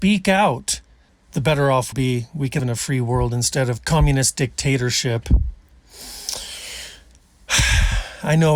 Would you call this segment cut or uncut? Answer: cut